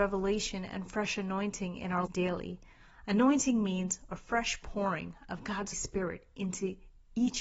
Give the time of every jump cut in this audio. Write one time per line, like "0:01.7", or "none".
0:02.1
0:05.7